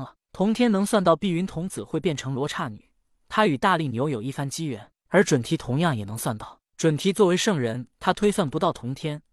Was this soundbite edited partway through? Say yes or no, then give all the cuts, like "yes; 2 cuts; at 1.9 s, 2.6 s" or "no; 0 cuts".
yes; 1 cut; at 7.9 s